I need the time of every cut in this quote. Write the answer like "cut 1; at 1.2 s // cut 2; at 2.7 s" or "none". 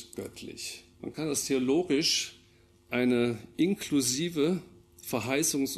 cut 1; at 0.9 s